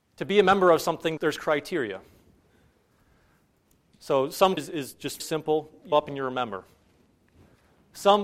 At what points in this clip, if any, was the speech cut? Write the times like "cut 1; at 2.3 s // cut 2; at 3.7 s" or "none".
cut 1; at 1.2 s // cut 2; at 4.6 s // cut 3; at 5.2 s // cut 4; at 5.9 s